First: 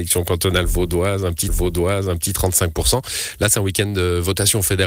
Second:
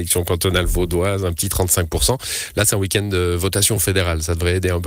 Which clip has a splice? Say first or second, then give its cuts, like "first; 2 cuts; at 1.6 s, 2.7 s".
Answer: first; 1 cut; at 1.5 s